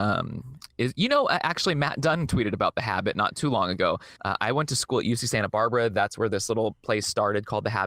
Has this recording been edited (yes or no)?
yes